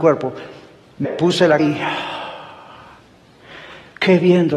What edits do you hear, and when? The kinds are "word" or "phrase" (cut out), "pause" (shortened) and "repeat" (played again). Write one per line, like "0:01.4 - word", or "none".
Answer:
0:01.0 - word
0:01.6 - word